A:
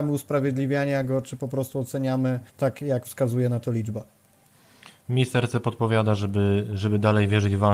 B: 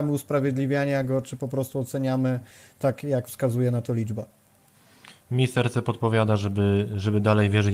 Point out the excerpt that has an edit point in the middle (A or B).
A